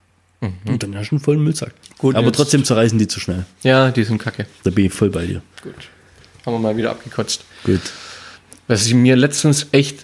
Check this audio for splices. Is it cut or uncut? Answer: uncut